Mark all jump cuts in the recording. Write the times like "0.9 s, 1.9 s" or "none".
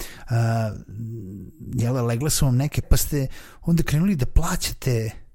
2.8 s